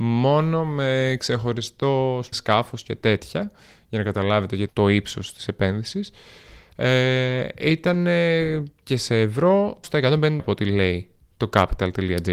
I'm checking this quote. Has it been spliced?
yes; 4 cuts; at 2.3 s, 4.7 s, 9.8 s, 10.4 s

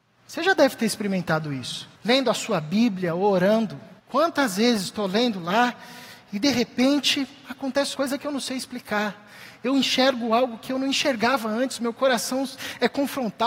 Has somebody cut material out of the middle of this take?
yes; 3 cuts; at 2.0 s, 4.0 s, 7.9 s

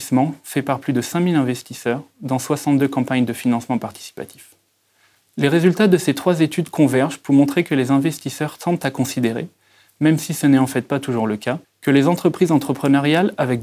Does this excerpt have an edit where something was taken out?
yes; 1 cut; at 11.6 s

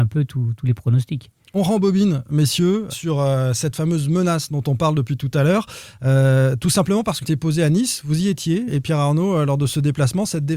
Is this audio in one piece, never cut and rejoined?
no; 3 cuts; at 2.9 s, 7.2 s, 8.7 s

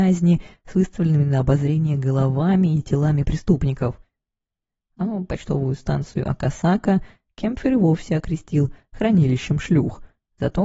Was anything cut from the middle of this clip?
no; 0 cuts

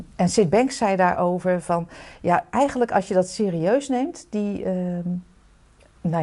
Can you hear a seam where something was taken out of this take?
no; 0 cuts

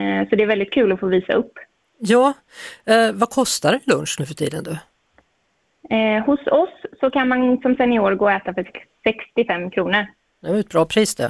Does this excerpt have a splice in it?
no; 0 cuts

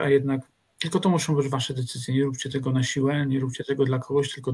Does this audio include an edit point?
no; 0 cuts

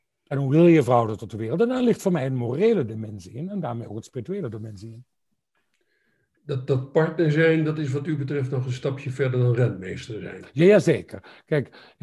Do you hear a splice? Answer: no; 0 cuts

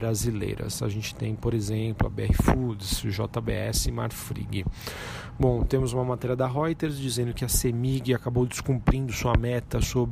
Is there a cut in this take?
no; 0 cuts

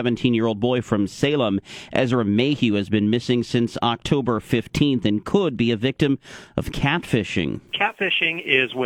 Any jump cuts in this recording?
no; 0 cuts

